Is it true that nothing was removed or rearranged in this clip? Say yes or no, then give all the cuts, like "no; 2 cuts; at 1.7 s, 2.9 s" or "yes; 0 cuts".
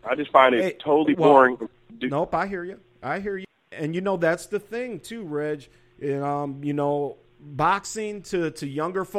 no; 1 cut; at 3.6 s